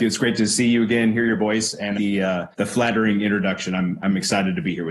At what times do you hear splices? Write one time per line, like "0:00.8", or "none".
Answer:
0:02.0
0:02.5

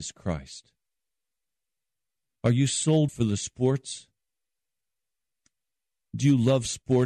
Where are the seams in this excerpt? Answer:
0:03.1

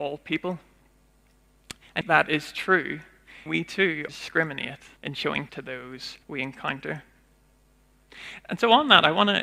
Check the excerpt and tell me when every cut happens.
0:02.0
0:03.5
0:04.1
0:05.0
0:05.5
0:06.2

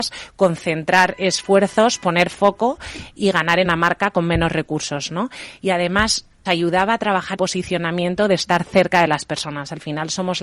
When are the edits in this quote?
0:03.2
0:03.6
0:06.5
0:07.4

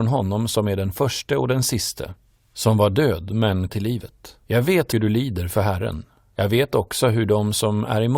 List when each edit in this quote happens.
0:03.7
0:04.4
0:04.9

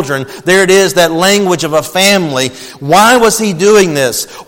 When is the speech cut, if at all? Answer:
none

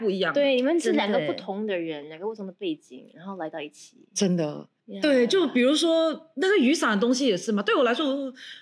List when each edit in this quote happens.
0:04.8

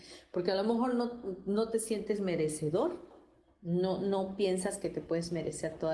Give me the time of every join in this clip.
none

